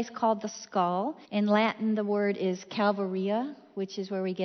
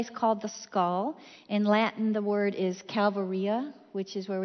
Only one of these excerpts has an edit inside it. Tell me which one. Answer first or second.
first